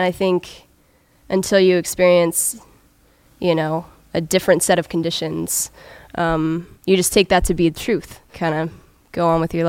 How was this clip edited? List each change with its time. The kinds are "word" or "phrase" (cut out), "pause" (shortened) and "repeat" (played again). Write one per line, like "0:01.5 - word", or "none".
0:06.7 - pause
0:08.3 - word